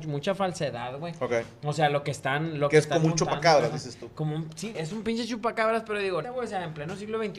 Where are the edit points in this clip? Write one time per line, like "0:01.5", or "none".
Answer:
0:04.7
0:06.2

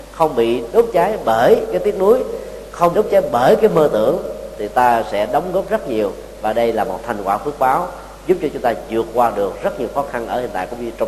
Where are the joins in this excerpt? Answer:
0:02.9

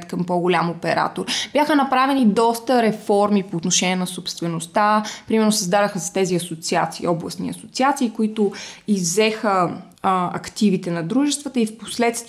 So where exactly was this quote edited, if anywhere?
none

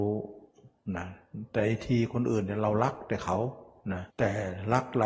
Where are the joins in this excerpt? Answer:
0:04.1

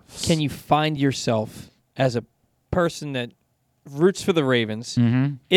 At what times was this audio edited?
none

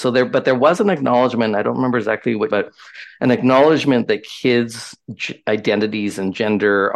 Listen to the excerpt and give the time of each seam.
0:02.5

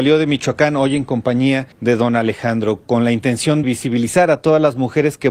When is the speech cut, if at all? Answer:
0:01.7
0:03.6

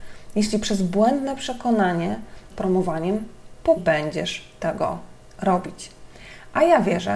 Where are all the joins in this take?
0:02.5
0:03.8

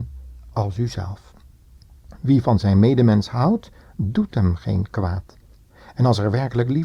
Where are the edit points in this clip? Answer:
none

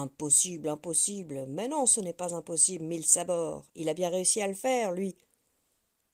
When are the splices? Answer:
0:03.7

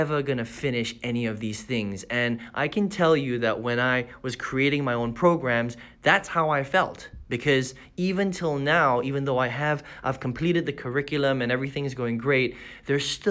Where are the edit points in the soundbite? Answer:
none

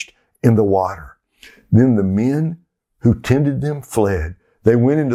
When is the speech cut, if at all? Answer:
none

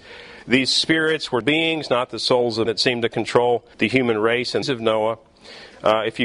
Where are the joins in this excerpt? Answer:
0:01.4
0:02.7
0:03.7
0:04.6

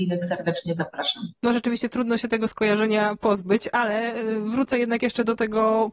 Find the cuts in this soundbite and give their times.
none

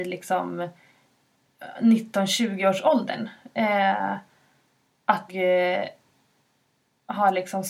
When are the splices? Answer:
0:05.3

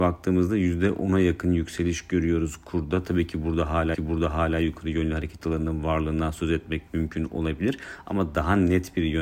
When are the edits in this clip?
0:03.9

